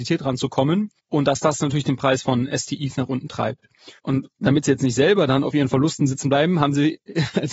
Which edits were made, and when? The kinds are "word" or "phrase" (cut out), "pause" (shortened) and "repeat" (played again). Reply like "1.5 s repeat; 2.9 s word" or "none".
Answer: 1.0 s pause; 4.0 s pause